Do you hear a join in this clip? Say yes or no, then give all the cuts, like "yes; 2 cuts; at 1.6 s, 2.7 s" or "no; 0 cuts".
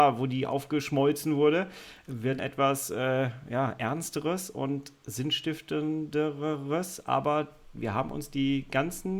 yes; 1 cut; at 2.4 s